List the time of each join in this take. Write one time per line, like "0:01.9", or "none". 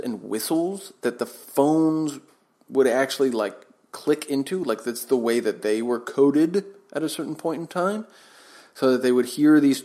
none